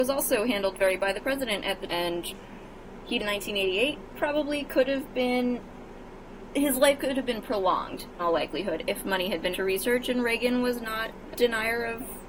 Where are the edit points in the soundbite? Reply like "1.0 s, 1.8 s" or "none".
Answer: 1.0 s, 1.9 s, 3.2 s, 8.2 s, 9.5 s, 11.3 s